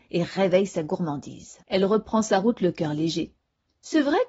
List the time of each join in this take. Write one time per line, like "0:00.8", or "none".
0:01.6

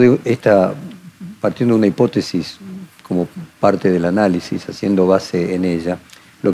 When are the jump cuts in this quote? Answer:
none

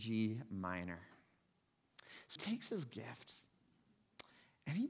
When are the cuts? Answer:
0:02.4

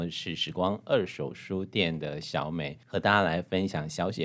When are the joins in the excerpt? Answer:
0:02.8

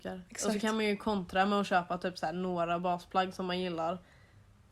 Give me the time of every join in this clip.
none

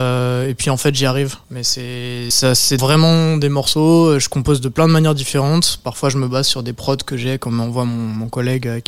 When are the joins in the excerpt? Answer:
0:01.4
0:02.3
0:02.8

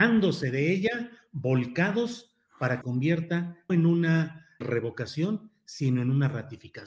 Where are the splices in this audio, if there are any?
0:02.8
0:03.7
0:04.6

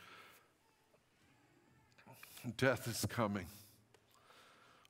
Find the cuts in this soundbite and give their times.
none

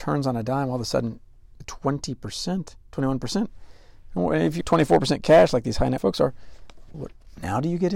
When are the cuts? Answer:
0:01.6
0:04.6
0:06.0
0:06.9

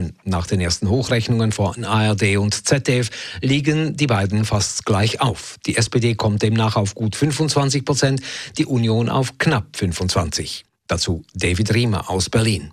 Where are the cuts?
none

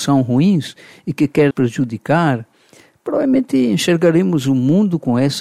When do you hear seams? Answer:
0:01.5

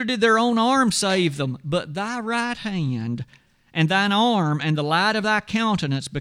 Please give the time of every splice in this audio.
none

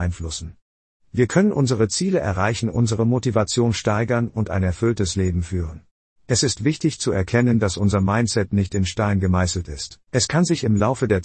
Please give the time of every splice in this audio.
0:06.0
0:10.1

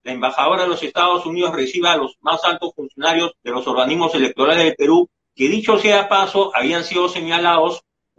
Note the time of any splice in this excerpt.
0:03.4

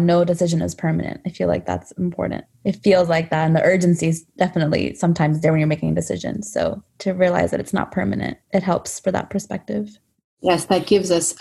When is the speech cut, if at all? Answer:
0:02.5
0:06.9
0:08.4

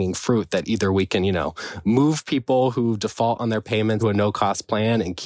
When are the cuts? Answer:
0:04.0

